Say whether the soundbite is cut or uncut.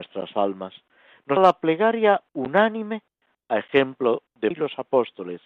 cut